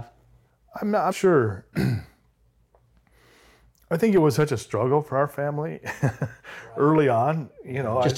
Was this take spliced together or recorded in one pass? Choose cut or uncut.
cut